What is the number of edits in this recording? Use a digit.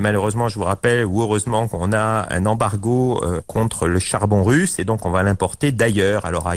0